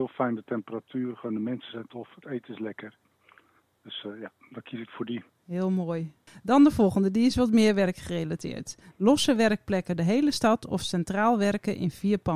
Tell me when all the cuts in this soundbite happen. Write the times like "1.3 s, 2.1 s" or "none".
5.3 s, 10.0 s